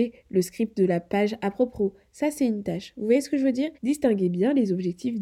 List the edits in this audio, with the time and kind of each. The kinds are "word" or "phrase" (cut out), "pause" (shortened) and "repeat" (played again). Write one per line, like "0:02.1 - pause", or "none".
0:03.7 - pause